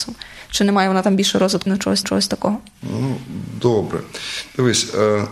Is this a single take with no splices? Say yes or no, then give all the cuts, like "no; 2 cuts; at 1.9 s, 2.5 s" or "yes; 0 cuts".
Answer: no; 2 cuts; at 1.7 s, 2.0 s